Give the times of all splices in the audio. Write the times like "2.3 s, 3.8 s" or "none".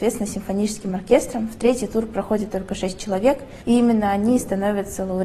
3.6 s